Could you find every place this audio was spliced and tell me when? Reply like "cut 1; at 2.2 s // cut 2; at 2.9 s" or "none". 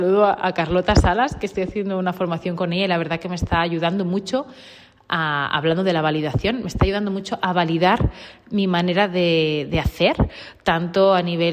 none